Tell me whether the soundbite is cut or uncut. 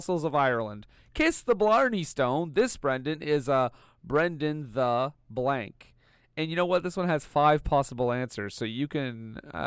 uncut